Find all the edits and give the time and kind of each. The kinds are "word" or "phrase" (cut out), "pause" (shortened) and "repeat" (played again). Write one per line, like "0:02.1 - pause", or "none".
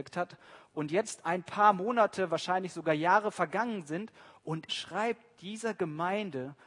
0:04.7 - word